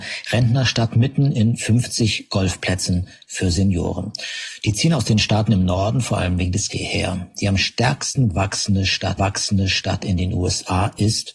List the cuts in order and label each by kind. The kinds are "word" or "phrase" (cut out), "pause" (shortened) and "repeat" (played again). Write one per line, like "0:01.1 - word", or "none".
0:06.7 - word
0:09.2 - repeat